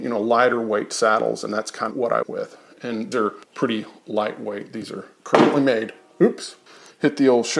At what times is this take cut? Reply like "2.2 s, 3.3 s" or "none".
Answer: 1.9 s, 2.2 s, 3.1 s, 3.4 s, 6.7 s